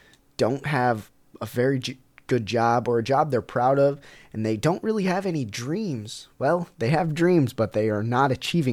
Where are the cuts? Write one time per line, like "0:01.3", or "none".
none